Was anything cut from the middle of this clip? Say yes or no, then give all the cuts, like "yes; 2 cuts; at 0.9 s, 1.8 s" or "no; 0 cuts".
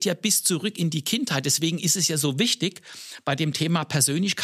no; 0 cuts